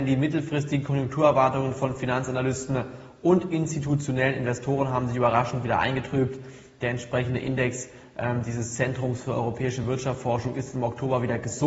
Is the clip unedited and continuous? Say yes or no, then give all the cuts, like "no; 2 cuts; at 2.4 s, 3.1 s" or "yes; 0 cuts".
yes; 0 cuts